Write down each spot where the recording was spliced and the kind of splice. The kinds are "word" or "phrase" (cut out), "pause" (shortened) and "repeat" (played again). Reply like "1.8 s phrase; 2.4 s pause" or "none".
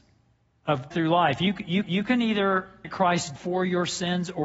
0.9 s word; 1.8 s repeat; 2.8 s word; 3.4 s word